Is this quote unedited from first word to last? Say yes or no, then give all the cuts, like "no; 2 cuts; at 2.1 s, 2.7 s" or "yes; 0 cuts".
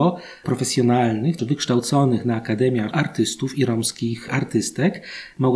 no; 2 cuts; at 1.4 s, 2.9 s